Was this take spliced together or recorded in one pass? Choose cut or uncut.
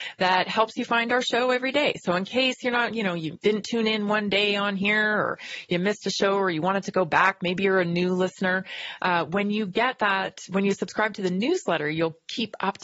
cut